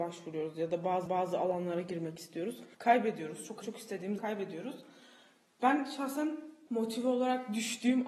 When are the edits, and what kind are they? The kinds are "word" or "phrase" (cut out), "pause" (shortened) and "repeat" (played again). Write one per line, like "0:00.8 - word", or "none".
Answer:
0:01.1 - repeat
0:02.7 - pause
0:03.6 - word
0:04.2 - word
0:06.7 - pause